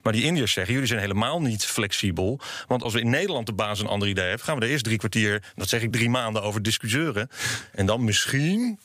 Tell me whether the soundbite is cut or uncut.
cut